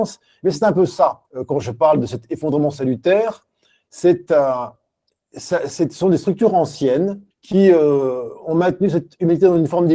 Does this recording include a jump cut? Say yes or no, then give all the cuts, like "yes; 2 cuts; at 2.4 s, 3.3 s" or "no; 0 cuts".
yes; 2 cuts; at 1.3 s, 7.3 s